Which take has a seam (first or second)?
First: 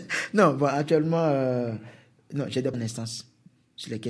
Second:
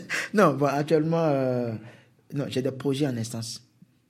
first